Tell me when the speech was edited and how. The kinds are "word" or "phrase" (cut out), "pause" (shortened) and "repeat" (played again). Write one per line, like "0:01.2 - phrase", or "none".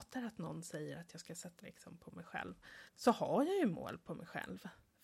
0:01.6 - word
0:02.9 - pause